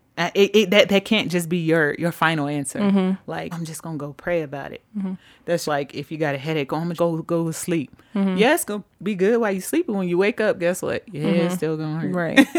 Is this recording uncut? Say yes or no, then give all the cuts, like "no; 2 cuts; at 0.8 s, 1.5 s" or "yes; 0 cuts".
no; 3 cuts; at 3.5 s, 5.6 s, 7.0 s